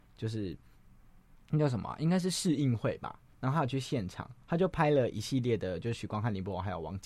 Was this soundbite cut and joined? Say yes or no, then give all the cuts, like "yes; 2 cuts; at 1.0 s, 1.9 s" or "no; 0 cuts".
yes; 2 cuts; at 3.3 s, 4.4 s